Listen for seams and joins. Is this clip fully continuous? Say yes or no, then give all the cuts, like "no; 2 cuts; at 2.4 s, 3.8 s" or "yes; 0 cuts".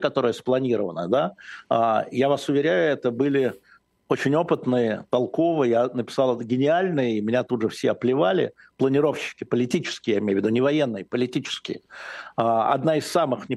yes; 0 cuts